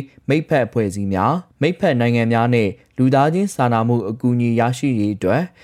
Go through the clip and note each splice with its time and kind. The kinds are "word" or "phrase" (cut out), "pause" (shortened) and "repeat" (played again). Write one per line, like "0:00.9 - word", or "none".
0:01.5 - pause